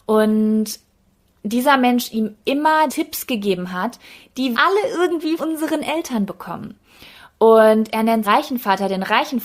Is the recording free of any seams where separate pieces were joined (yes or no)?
no